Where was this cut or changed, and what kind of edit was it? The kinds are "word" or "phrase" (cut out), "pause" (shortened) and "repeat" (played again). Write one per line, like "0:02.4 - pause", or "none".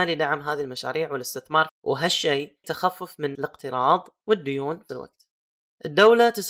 0:01.7 - word
0:02.6 - word
0:03.3 - word
0:04.9 - word